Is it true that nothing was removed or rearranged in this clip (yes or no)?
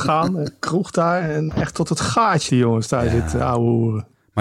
no